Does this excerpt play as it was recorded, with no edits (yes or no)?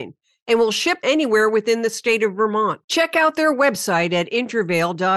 no